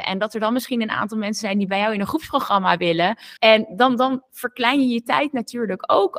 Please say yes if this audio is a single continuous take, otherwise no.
no